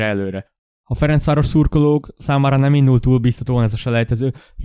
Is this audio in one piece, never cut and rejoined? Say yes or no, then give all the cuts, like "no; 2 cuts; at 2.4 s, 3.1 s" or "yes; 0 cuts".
yes; 0 cuts